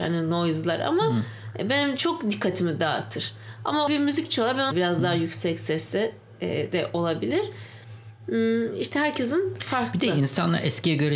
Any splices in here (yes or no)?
yes